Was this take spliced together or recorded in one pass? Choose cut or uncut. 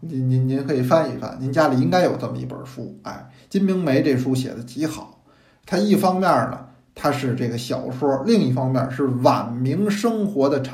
uncut